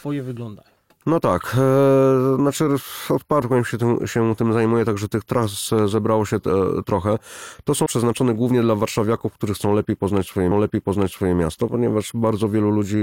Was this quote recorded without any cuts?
no; 3 cuts; at 3.4 s, 7.9 s, 10.5 s

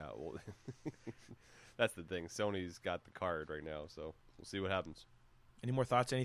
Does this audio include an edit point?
no; 0 cuts

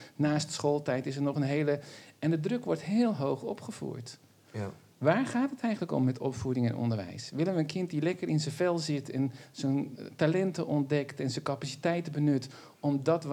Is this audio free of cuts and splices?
yes; 0 cuts

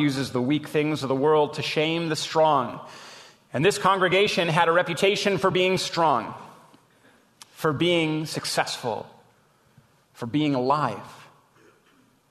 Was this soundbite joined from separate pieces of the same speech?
no; 0 cuts

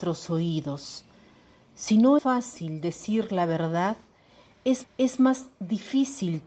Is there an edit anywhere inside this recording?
yes; 2 cuts; at 2.2 s, 4.8 s

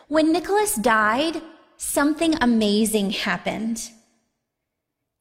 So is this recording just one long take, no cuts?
yes; 0 cuts

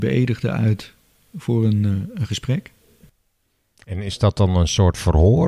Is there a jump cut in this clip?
no; 0 cuts

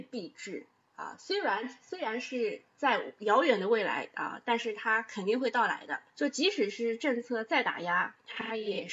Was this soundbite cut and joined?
yes; 1 cut; at 6.1 s

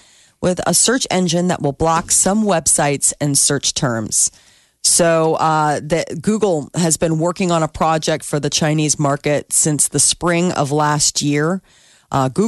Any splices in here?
no; 0 cuts

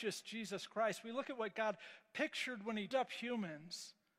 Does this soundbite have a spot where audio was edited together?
yes; 1 cut; at 2.9 s

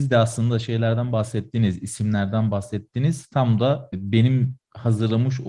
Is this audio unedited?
yes; 0 cuts

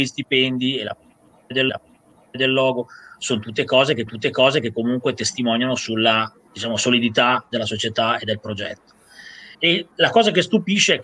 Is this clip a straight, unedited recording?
no; 4 cuts; at 1.7 s, 4.1 s, 6.5 s, 9.5 s

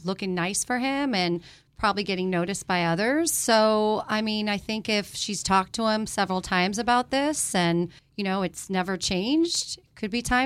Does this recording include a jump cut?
yes; 1 cut; at 8.0 s

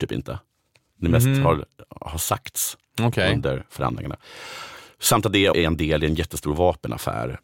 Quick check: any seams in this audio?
yes; 1 cut; at 5.5 s

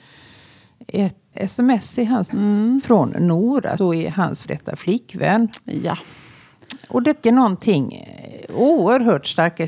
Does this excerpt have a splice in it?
yes; 5 cuts; at 1.3 s, 2.3 s, 3.8 s, 4.4 s, 7.2 s

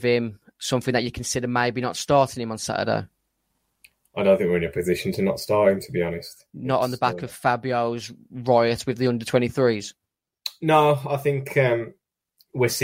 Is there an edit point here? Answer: no; 0 cuts

